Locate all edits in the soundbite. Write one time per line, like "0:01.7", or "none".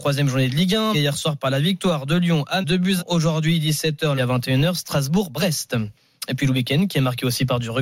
0:00.9
0:02.6
0:03.0
0:04.2